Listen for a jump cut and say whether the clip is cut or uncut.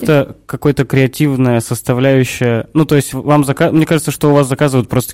uncut